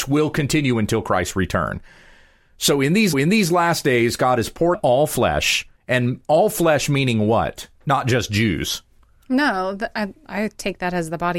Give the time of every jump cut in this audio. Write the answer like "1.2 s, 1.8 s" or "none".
3.1 s, 4.7 s, 5.8 s, 7.8 s